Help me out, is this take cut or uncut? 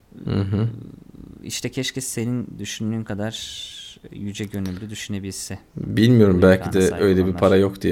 uncut